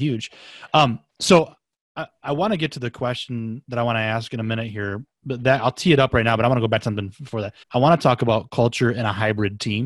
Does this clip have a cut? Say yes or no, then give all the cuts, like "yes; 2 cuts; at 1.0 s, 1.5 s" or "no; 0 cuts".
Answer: yes; 3 cuts; at 1.1 s, 3.6 s, 7.6 s